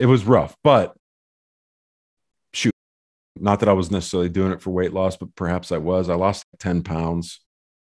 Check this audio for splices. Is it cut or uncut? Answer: uncut